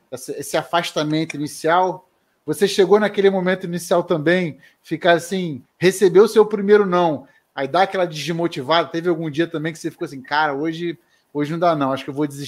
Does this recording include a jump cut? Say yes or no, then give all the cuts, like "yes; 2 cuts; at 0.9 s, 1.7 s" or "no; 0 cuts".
no; 0 cuts